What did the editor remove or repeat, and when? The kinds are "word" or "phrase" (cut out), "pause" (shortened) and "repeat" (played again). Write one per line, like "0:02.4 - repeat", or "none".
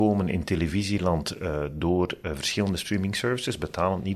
none

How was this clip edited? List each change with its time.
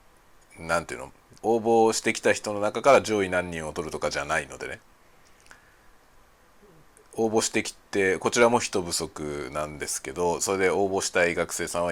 0:01.4 - pause

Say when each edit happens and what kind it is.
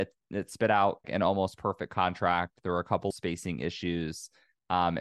0:01.0 - word
0:03.1 - word

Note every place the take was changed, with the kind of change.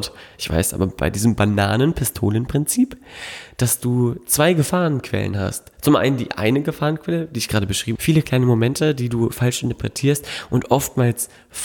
0:08.0 - word

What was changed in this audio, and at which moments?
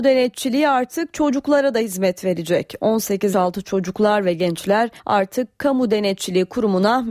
0:03.3 - word
0:05.0 - pause

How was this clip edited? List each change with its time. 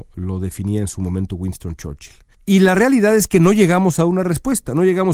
0:02.3 - pause

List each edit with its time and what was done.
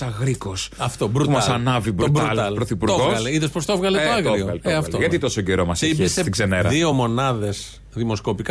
none

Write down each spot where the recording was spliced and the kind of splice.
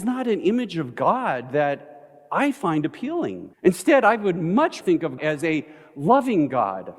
0:03.5 - pause
0:04.8 - word
0:05.2 - word

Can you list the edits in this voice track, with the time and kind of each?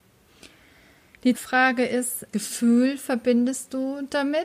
0:01.3 - word
0:02.3 - word

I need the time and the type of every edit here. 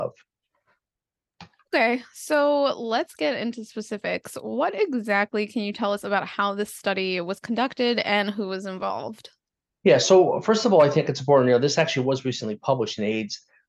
0:01.6 - pause

